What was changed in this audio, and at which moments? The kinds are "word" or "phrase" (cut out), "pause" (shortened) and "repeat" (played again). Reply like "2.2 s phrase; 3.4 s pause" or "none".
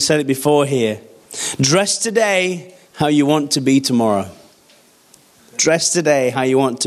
none

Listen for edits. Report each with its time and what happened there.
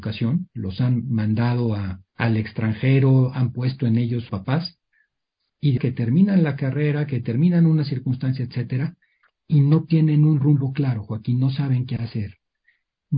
2.1 s pause; 4.3 s phrase; 5.8 s phrase; 9.2 s pause

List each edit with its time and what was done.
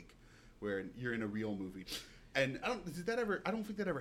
1.8 s word; 2.6 s word

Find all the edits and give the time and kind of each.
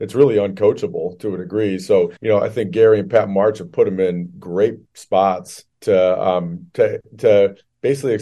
2.2 s pause; 5.7 s pause

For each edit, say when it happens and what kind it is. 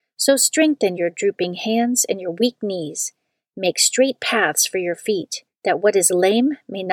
none

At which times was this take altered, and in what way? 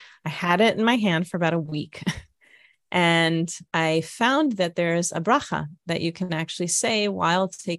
3.7 s pause

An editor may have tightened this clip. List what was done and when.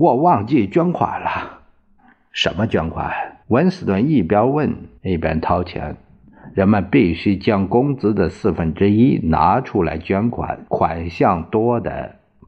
2.0 s pause; 3.4 s pause; 5.0 s pause; 10.7 s pause

